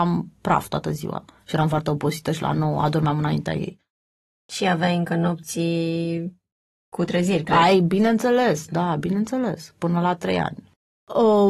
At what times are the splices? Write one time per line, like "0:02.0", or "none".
none